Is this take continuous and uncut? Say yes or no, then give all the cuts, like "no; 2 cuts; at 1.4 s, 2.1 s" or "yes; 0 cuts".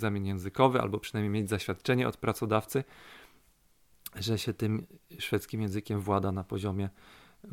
yes; 0 cuts